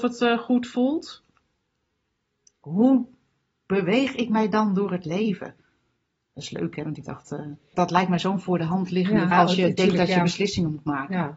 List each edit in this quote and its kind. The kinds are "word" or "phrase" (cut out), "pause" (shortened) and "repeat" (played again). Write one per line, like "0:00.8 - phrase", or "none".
0:07.7 - word
0:09.3 - word